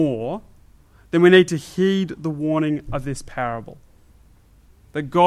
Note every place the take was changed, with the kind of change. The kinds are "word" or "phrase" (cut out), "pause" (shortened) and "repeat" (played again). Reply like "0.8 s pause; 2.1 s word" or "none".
none